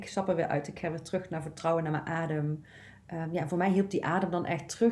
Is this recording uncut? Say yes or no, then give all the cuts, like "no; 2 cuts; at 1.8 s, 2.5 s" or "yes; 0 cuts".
yes; 0 cuts